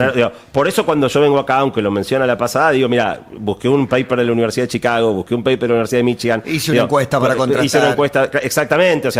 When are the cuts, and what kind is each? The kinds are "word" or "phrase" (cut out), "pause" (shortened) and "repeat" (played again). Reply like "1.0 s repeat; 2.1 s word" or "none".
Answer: none